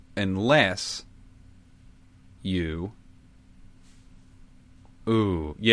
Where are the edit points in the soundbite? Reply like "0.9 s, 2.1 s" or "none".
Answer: none